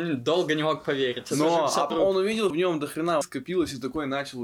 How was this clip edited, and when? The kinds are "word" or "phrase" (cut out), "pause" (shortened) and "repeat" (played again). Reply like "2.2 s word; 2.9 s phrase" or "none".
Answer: 1.9 s word; 2.5 s word; 3.2 s word